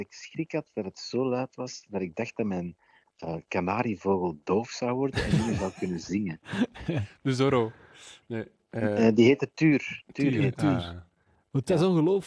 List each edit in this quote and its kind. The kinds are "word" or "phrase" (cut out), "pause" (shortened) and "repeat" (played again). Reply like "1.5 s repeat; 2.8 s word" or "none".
none